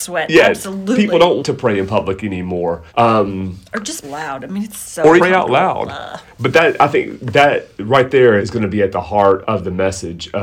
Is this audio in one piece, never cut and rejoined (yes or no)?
no